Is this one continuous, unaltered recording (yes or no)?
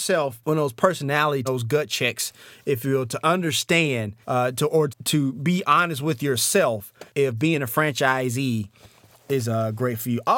no